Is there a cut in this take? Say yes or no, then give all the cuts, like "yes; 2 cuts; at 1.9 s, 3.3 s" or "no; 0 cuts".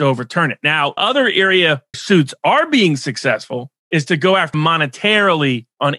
yes; 4 cuts; at 1.0 s, 1.9 s, 3.8 s, 4.5 s